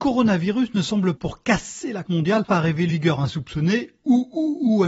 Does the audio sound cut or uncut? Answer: cut